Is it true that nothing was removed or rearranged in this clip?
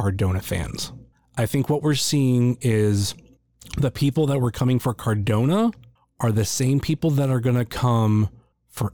yes; 0 cuts

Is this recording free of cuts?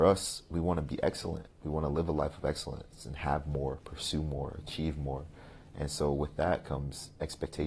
no; 1 cut; at 1.5 s

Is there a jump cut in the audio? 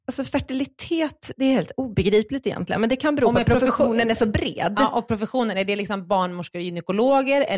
no; 0 cuts

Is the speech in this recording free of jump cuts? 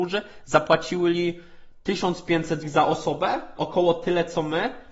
no; 2 cuts; at 2.6 s, 3.6 s

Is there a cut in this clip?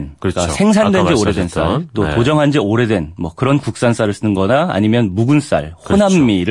no; 0 cuts

